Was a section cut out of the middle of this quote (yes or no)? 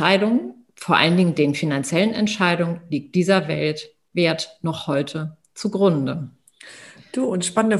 no